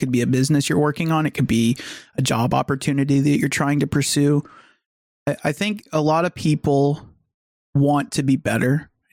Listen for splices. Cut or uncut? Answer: uncut